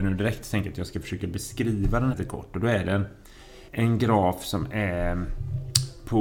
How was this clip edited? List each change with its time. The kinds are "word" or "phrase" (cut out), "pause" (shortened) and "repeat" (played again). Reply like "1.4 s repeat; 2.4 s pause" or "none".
2.1 s word; 3.7 s pause